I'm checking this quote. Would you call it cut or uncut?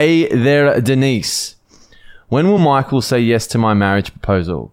uncut